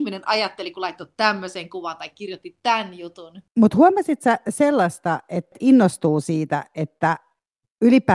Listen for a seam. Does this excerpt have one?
no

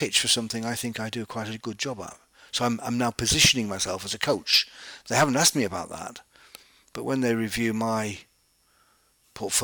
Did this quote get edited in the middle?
no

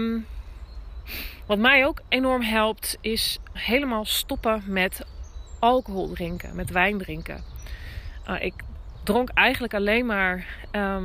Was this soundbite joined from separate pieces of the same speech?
yes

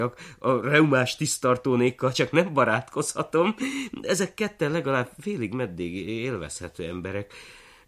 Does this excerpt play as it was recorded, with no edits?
yes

